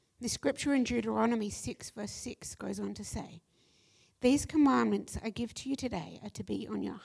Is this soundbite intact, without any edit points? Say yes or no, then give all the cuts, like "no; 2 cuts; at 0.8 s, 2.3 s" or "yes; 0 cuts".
yes; 0 cuts